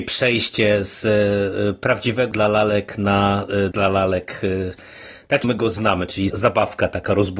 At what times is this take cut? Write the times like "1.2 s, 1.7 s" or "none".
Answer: 2.3 s, 3.7 s, 5.4 s, 6.3 s